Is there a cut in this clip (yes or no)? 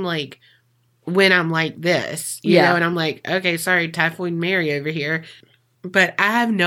no